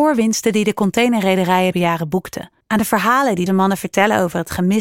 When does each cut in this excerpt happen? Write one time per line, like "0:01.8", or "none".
0:01.7
0:02.6
0:03.5